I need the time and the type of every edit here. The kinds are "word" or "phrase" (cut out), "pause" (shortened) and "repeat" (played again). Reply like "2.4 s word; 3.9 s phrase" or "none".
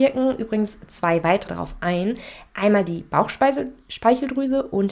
1.5 s word